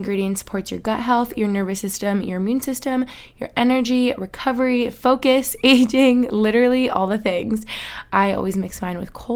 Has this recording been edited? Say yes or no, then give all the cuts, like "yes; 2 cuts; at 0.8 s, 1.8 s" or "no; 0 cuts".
no; 0 cuts